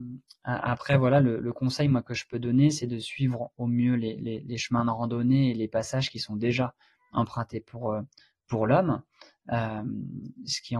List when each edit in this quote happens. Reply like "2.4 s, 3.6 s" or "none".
none